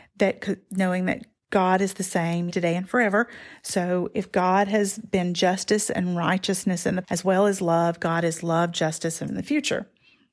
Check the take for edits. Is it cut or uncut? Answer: cut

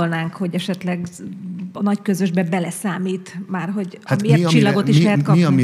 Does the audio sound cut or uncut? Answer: uncut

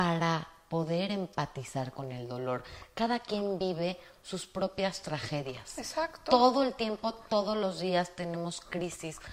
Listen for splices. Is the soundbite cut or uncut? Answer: uncut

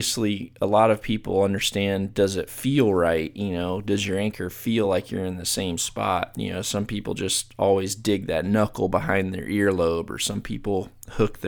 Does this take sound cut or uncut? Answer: uncut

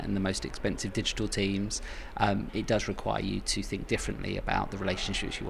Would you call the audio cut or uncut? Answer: uncut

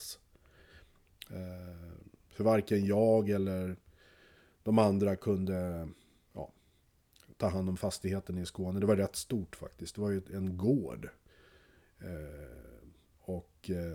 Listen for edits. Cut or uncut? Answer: uncut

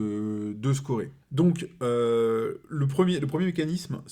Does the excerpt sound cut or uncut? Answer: cut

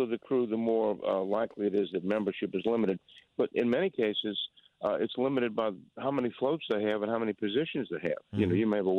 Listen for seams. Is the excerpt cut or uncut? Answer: uncut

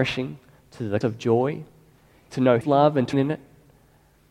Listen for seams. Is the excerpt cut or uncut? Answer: cut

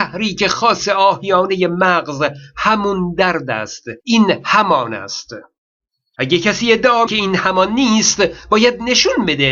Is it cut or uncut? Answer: cut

